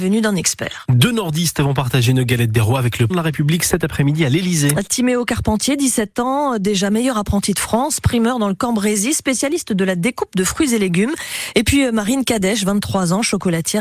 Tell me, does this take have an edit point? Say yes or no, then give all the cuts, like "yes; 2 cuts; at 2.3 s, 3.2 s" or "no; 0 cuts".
yes; 1 cut; at 3.1 s